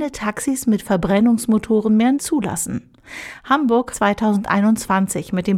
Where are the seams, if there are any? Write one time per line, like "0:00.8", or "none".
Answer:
0:02.1
0:03.9